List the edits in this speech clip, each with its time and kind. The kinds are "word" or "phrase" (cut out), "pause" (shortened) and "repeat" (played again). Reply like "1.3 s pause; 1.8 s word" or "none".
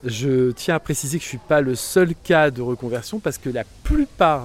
none